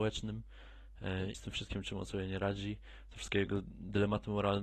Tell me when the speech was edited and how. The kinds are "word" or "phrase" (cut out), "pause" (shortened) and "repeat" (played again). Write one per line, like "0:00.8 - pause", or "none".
0:01.3 - word